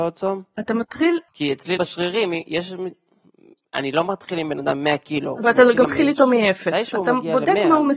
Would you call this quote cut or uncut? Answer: cut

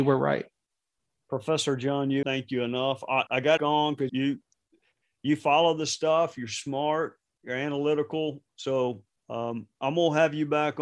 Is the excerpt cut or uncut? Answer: cut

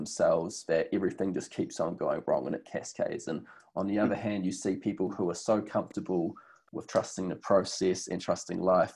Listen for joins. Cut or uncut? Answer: uncut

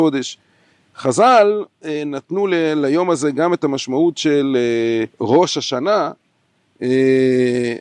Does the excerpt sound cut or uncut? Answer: cut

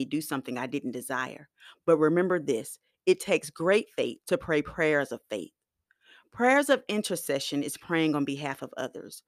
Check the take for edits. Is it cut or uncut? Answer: cut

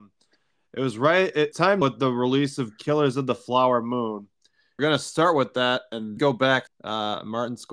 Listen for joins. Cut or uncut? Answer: cut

